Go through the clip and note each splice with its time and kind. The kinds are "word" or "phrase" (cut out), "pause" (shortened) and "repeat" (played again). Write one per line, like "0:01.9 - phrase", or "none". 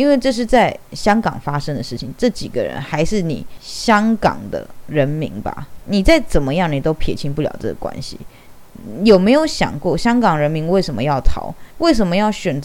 0:11.7 - pause